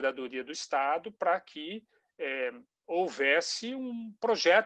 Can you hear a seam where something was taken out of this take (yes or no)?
no